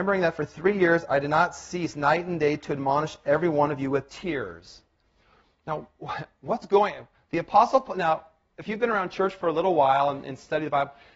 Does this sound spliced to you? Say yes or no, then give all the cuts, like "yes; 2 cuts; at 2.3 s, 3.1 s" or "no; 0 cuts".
no; 0 cuts